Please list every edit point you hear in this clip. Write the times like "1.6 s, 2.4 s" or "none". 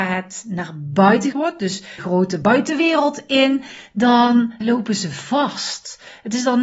1.3 s, 2.0 s, 2.4 s, 4.6 s